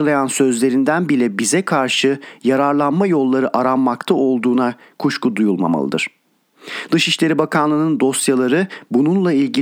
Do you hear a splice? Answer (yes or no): no